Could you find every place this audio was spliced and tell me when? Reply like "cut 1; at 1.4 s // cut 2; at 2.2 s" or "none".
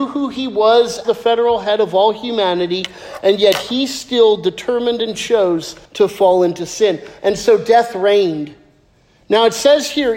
cut 1; at 1.0 s // cut 2; at 5.8 s